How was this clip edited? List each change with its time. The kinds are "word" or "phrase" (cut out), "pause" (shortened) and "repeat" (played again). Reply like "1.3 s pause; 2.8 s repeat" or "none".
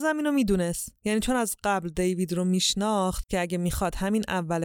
3.3 s word